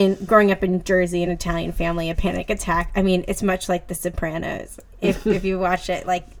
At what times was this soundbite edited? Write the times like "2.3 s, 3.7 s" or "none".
none